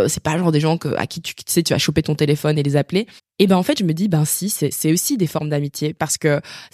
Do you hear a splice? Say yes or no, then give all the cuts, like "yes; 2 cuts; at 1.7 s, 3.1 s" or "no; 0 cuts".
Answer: yes; 2 cuts; at 3.2 s, 4.7 s